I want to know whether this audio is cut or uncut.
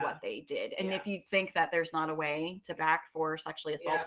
cut